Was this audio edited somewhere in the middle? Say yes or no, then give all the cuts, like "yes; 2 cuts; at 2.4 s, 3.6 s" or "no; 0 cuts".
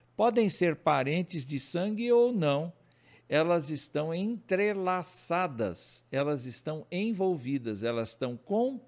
no; 0 cuts